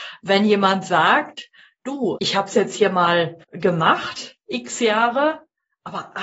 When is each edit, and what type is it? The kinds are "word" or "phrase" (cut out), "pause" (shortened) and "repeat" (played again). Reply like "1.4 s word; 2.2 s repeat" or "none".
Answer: 2.2 s word; 3.4 s pause